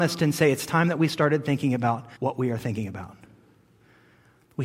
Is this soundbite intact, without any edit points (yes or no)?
no